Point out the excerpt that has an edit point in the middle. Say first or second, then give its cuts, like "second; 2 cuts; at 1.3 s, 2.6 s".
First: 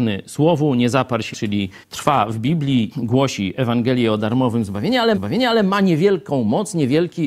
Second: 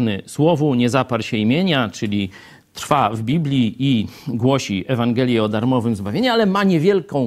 first; 4 cuts; at 1.3 s, 1.8 s, 2.9 s, 5.1 s